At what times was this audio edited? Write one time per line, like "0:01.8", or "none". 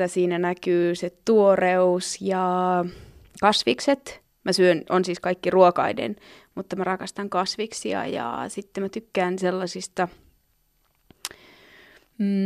none

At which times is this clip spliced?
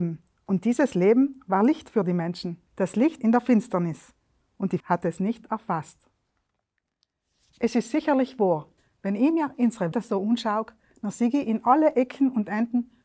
0:02.7
0:03.2
0:04.8
0:08.8
0:09.9

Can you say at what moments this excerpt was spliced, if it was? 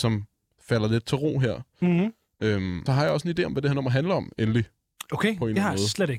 0:02.9

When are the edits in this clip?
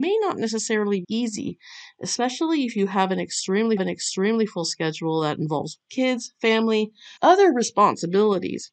0:01.0
0:03.8
0:05.8
0:07.2

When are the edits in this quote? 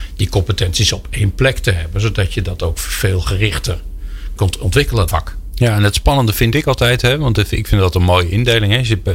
0:04.4
0:05.1

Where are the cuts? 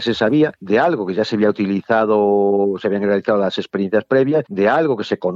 none

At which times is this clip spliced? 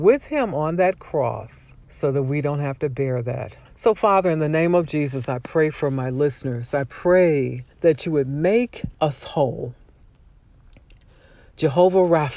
0:01.8
0:03.7
0:07.7
0:08.9

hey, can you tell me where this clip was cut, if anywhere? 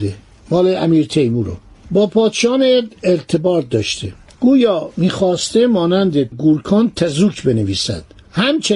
0:06.3

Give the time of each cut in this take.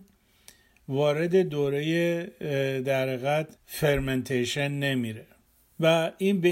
0:03.6

